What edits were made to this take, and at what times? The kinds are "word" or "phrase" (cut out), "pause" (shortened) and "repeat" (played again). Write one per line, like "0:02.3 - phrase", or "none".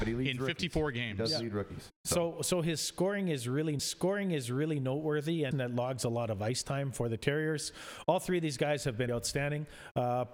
0:03.8 - repeat
0:05.5 - phrase
0:09.1 - word